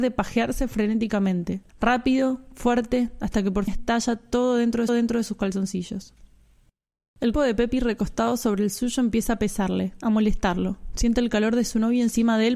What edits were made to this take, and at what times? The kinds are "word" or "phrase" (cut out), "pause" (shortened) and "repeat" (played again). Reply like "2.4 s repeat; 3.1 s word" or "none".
1.7 s pause; 3.7 s word; 4.9 s repeat; 7.3 s word